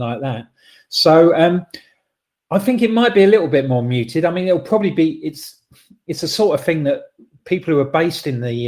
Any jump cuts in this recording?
no; 0 cuts

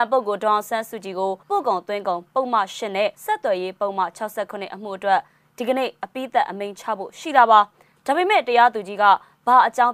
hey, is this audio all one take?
no; 2 cuts; at 1.4 s, 3.1 s

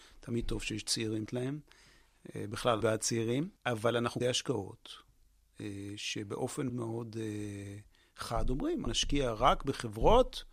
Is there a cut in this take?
yes; 6 cuts; at 1.3 s, 2.8 s, 3.6 s, 4.2 s, 6.7 s, 8.9 s

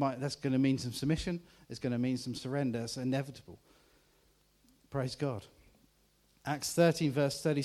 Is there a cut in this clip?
no; 0 cuts

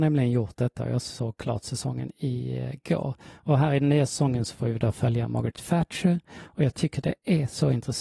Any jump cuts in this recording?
no; 0 cuts

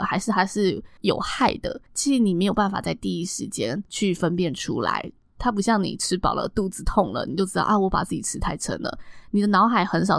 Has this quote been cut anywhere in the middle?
yes; 3 cuts; at 1.0 s, 1.9 s, 3.9 s

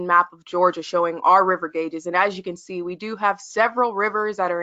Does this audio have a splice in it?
no; 0 cuts

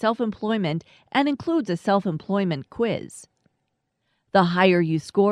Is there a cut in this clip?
no; 0 cuts

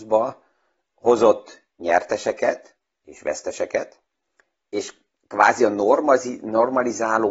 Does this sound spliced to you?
no; 0 cuts

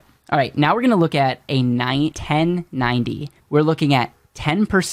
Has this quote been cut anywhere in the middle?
yes; 1 cut; at 3.4 s

